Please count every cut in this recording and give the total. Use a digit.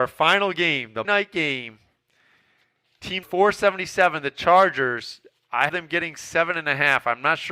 3